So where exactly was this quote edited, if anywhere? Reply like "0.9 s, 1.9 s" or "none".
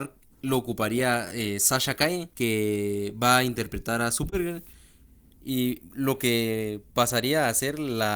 none